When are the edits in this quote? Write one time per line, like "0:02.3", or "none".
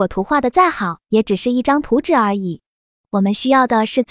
0:01.0